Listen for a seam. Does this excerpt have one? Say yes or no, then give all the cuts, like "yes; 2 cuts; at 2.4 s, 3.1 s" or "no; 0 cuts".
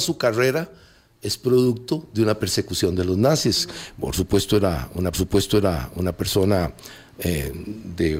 yes; 1 cut; at 5.1 s